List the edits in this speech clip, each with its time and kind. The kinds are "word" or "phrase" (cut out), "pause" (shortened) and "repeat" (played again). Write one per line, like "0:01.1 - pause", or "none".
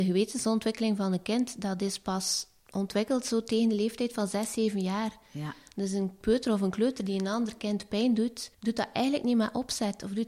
0:08.5 - pause